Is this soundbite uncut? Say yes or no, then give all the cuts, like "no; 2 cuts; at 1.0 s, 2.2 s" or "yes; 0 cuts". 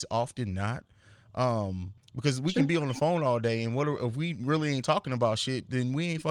yes; 0 cuts